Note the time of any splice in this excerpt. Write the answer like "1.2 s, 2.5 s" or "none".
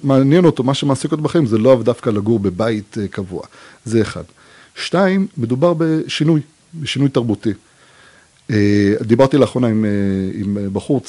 none